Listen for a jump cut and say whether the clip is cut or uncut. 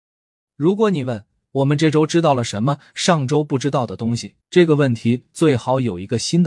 cut